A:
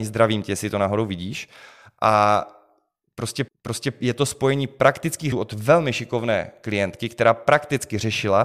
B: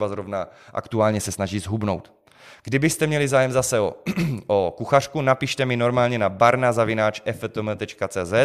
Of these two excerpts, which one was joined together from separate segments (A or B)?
A